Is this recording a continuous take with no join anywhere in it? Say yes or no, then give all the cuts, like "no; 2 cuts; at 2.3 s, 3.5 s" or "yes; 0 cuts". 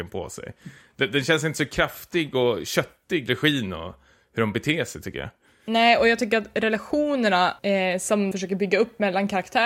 no; 3 cuts; at 3.3 s, 7.6 s, 8.3 s